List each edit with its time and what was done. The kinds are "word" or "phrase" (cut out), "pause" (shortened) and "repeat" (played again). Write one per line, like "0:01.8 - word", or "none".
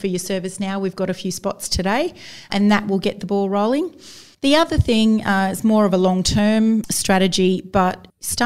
none